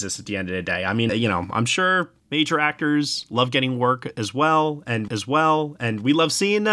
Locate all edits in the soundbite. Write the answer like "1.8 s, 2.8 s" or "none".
1.1 s, 2.2 s, 5.1 s